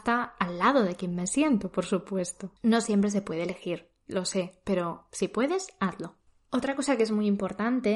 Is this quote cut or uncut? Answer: cut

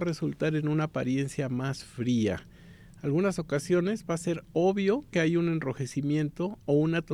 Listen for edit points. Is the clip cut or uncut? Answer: uncut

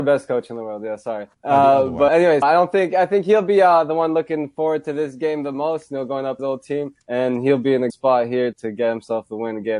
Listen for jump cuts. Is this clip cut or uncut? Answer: cut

